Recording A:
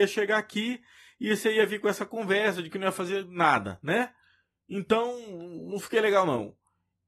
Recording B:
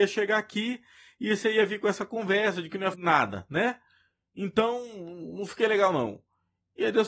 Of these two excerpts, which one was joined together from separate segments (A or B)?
B